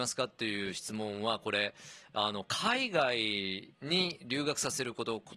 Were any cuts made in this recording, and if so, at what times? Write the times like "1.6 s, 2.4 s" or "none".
3.7 s